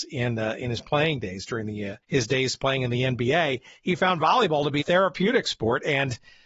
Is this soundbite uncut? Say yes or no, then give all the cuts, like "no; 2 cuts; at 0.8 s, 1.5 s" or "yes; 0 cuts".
no; 2 cuts; at 2.0 s, 4.8 s